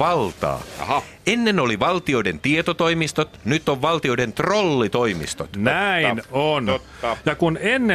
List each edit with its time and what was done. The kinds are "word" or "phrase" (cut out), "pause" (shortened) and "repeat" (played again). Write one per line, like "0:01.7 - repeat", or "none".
none